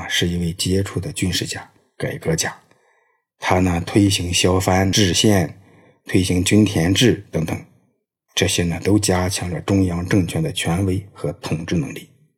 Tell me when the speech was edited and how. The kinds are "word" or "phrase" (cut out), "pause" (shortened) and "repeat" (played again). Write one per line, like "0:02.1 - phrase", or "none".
none